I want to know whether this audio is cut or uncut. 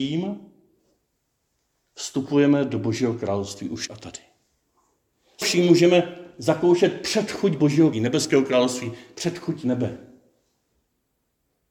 cut